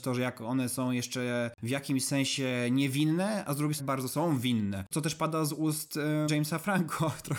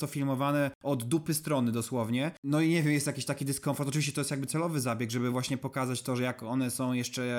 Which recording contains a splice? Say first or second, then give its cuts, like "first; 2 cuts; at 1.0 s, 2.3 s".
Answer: first; 2 cuts; at 3.8 s, 6.3 s